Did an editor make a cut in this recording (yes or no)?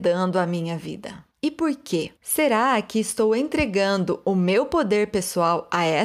yes